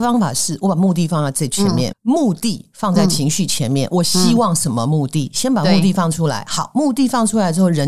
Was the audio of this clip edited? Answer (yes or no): yes